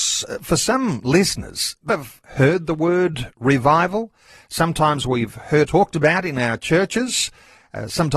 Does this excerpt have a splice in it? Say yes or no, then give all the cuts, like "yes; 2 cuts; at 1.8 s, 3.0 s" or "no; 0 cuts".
yes; 2 cuts; at 1.9 s, 5.7 s